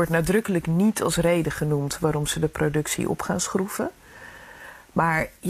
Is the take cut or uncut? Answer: uncut